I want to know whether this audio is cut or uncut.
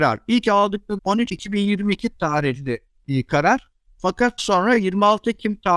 cut